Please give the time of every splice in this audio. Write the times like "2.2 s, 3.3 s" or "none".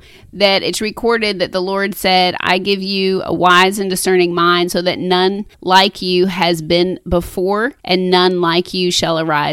5.5 s, 7.8 s